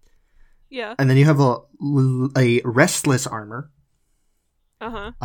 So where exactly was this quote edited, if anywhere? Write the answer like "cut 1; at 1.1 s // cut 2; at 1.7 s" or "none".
none